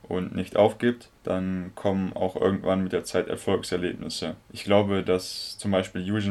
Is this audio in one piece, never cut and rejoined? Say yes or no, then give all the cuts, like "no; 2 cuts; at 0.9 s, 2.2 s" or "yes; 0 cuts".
no; 2 cuts; at 1.2 s, 4.4 s